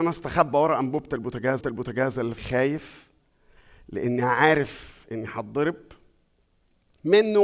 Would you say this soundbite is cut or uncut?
cut